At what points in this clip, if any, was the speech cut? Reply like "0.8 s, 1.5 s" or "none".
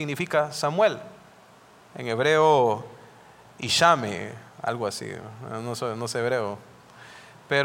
none